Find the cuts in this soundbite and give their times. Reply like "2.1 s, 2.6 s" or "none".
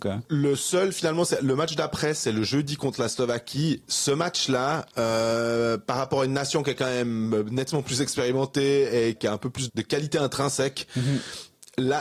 4.9 s, 9.2 s, 9.7 s